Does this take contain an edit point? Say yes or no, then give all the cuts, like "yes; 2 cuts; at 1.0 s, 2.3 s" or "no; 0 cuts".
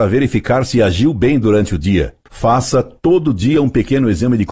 no; 0 cuts